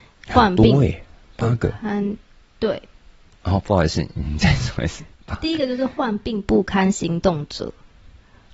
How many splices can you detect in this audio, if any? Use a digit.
0